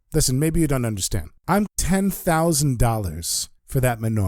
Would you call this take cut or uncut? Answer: cut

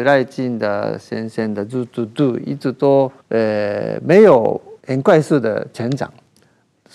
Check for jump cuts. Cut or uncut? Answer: cut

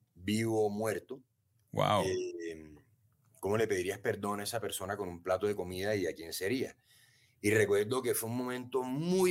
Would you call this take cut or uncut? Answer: uncut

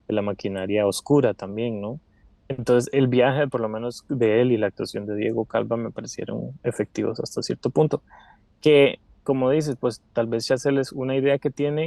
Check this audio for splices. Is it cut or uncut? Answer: uncut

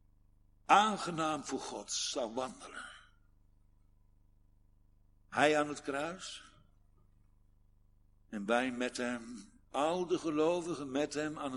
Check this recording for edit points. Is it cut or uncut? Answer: uncut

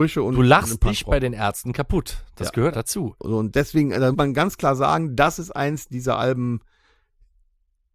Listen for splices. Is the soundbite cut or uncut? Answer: cut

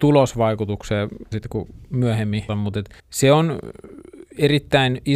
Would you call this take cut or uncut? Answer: cut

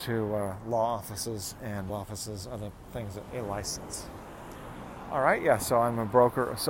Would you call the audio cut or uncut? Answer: cut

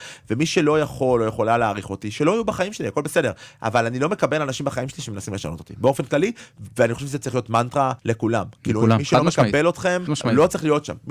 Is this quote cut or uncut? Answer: cut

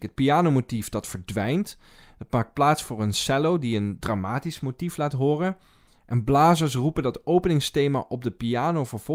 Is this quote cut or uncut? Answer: uncut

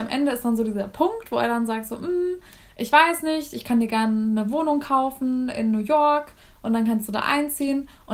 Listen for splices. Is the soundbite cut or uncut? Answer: uncut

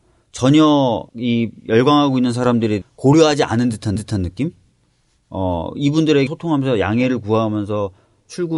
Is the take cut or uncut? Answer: cut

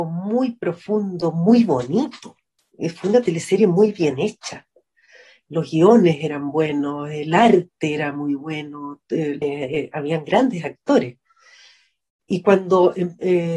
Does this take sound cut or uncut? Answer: cut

